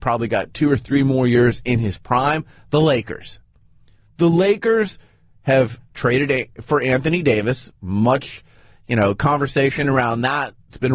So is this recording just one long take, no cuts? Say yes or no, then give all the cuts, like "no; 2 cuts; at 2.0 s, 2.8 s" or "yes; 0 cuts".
yes; 0 cuts